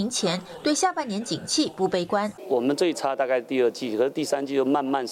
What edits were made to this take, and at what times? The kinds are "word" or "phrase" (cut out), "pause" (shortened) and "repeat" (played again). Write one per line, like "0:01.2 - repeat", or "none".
none